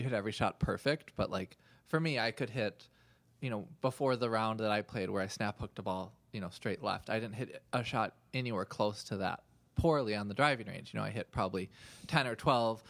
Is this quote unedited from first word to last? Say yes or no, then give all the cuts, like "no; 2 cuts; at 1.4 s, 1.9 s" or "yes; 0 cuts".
yes; 0 cuts